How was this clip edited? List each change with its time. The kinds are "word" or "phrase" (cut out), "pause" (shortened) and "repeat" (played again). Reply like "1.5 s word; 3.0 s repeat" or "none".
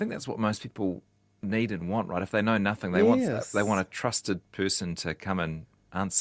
none